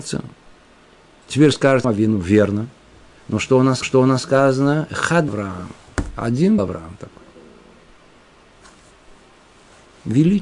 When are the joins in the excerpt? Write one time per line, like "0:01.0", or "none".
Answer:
0:01.8
0:03.8
0:05.3
0:06.6